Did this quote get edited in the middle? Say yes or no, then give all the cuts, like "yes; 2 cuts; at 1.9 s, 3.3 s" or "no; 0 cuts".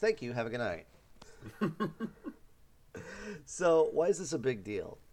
no; 0 cuts